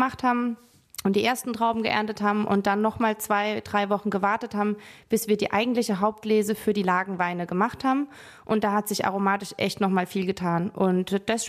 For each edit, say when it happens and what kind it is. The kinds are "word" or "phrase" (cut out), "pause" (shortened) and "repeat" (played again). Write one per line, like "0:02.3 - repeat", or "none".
none